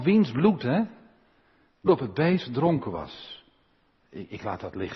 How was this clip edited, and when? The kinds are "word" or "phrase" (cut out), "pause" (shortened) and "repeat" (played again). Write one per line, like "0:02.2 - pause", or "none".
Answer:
0:01.9 - word